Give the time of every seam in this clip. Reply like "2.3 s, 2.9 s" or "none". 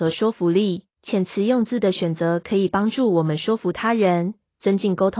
0.9 s